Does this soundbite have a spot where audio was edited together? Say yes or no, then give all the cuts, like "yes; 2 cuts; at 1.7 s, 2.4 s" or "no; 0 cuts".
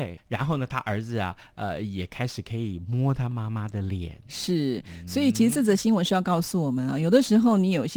no; 0 cuts